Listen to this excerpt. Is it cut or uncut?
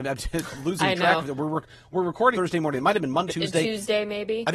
cut